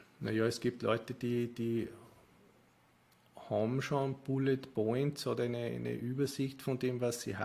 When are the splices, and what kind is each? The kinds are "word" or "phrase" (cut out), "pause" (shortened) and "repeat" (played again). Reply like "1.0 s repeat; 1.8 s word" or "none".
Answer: none